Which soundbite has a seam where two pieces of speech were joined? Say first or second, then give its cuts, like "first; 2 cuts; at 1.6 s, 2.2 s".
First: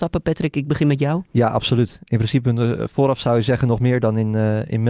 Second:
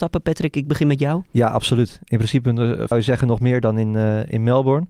second; 1 cut; at 2.9 s